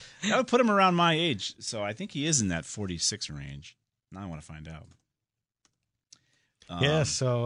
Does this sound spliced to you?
no; 0 cuts

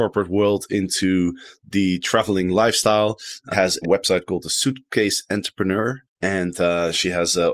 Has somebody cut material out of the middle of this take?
yes; 3 cuts; at 3.5 s, 3.8 s, 6.1 s

